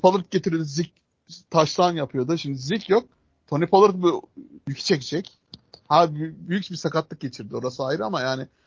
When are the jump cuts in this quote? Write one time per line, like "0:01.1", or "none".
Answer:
none